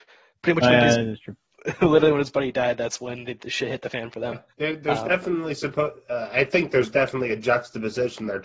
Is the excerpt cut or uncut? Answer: cut